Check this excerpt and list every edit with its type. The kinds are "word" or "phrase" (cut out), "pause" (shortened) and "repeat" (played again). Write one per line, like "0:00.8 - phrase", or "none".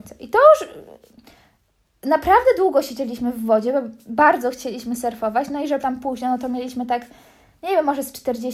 0:05.8 - word